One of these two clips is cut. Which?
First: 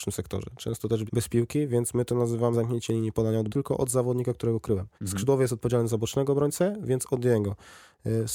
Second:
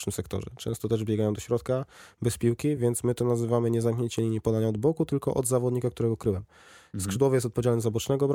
first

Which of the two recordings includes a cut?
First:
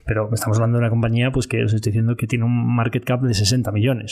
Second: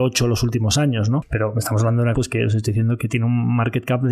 second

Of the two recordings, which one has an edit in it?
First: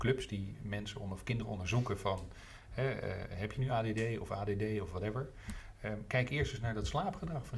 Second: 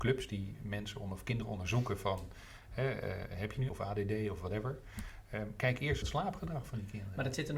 second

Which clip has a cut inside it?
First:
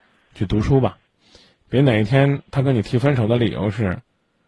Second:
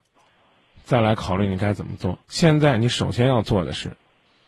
second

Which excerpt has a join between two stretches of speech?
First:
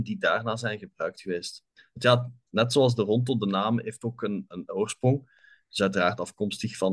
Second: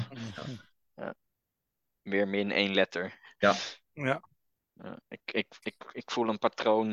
first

